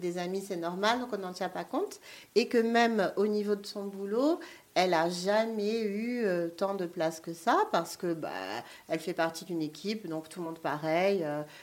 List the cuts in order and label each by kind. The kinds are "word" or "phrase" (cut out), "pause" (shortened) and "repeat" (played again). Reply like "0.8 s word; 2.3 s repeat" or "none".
none